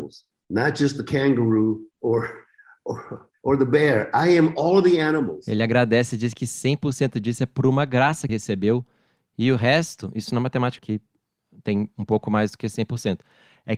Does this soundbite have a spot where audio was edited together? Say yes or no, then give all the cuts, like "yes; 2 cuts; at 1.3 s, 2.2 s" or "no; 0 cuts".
yes; 4 cuts; at 1.9 s, 3.4 s, 8.3 s, 10.8 s